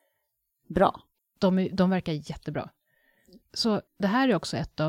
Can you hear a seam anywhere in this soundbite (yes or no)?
yes